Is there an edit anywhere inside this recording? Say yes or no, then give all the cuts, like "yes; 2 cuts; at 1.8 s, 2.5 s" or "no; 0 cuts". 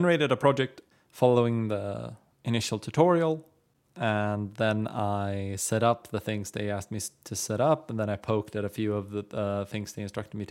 no; 0 cuts